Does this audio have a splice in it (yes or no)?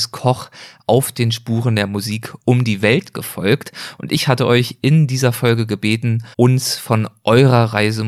yes